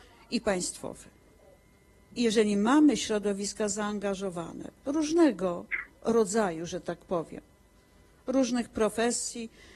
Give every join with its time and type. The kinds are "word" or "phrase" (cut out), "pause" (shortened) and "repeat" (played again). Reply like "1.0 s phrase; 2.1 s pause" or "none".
none

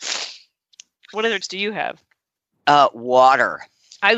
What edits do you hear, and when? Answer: 1.4 s word

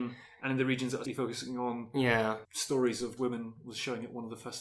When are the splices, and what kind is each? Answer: 1.0 s word; 2.4 s word; 3.2 s word

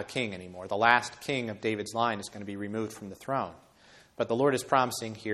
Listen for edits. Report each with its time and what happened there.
none

